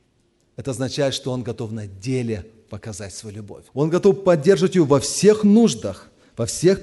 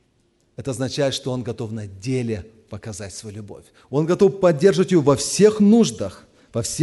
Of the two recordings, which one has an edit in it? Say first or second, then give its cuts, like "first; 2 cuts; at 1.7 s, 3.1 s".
first; 1 cut; at 3.7 s